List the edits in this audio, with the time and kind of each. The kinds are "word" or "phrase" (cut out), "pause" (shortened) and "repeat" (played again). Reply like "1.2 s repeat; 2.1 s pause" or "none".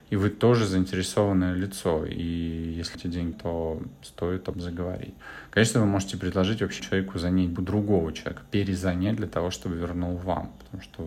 2.9 s word; 3.3 s word; 4.5 s word; 6.8 s word; 7.6 s word